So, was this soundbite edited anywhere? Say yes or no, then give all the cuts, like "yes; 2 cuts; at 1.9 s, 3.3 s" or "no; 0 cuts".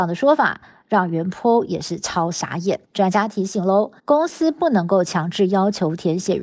yes; 2 cuts; at 2.8 s, 4.0 s